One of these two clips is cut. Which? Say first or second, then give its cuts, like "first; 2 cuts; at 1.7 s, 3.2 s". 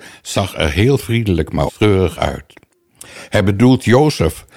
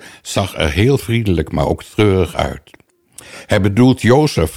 first; 1 cut; at 1.7 s